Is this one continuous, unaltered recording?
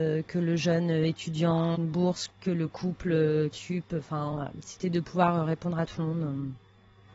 no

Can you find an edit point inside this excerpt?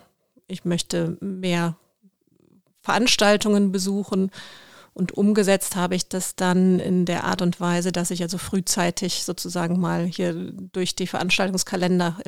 no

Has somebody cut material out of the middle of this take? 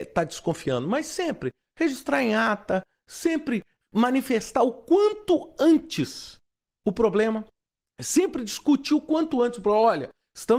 no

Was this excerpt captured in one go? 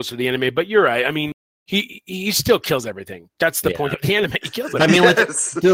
yes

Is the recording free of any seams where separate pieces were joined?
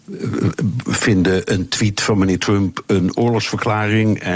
yes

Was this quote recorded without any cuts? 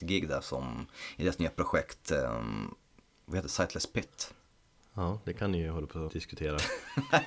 no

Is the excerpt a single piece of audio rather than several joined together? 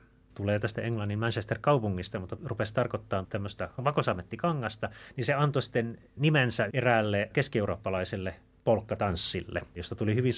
yes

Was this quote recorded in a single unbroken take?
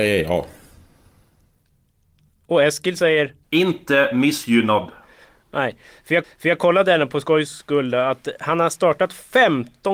no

